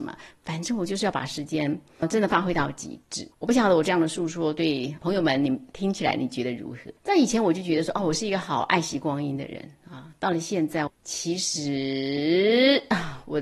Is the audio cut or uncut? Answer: cut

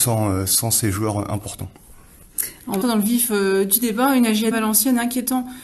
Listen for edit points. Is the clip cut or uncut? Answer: cut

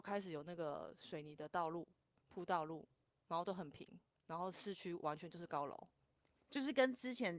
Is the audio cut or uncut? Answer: uncut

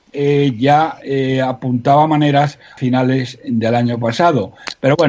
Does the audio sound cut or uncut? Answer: cut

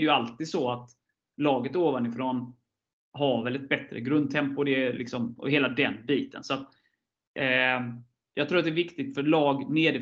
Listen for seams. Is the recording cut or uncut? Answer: uncut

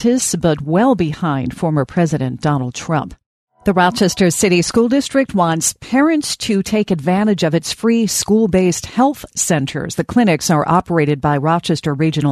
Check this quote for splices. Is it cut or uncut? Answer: uncut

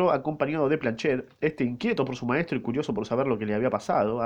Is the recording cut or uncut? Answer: uncut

